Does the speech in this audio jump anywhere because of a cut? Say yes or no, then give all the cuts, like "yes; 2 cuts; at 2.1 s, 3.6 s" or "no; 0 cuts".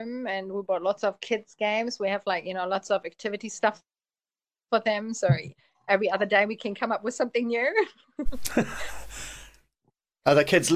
no; 0 cuts